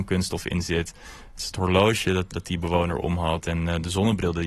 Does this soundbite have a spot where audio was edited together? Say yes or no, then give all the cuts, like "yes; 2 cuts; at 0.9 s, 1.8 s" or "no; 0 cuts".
no; 0 cuts